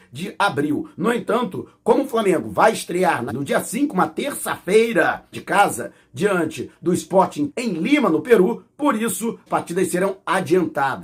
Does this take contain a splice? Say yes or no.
yes